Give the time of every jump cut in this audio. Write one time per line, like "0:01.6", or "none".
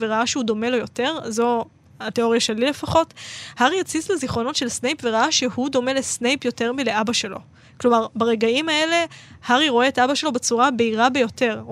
none